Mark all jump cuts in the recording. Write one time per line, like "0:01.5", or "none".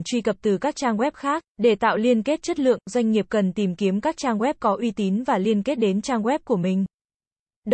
0:01.5